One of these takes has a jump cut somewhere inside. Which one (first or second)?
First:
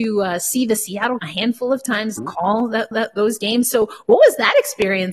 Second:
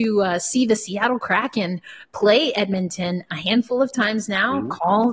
first